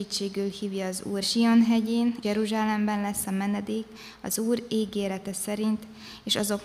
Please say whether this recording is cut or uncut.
cut